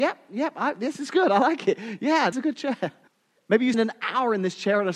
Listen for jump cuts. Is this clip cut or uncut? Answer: cut